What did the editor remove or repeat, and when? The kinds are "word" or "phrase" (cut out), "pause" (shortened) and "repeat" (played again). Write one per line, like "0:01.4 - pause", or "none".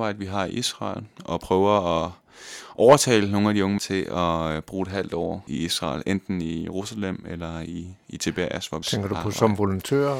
0:03.8 - word
0:05.5 - word
0:08.8 - word